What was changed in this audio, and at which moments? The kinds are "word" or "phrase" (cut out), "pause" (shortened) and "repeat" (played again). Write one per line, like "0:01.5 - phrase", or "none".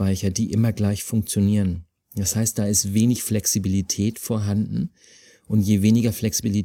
none